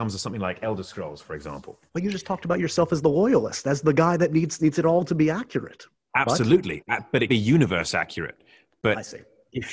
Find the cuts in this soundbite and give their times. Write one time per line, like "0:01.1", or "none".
0:01.9
0:04.6
0:05.9
0:07.3